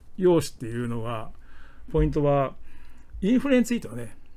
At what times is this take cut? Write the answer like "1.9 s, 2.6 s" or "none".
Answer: 1.9 s